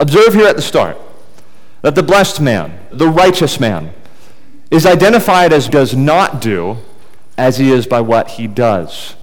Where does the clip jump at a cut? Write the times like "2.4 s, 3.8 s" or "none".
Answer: 2.9 s, 5.7 s